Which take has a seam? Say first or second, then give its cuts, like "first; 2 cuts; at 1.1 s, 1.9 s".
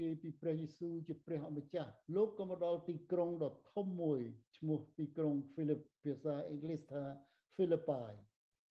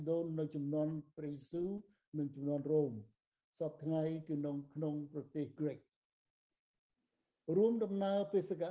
first; 1 cut; at 2.0 s